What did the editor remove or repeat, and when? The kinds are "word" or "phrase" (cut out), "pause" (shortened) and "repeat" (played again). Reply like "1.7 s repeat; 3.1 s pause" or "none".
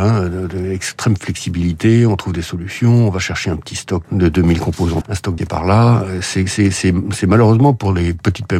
4.0 s word; 5.0 s word; 5.4 s word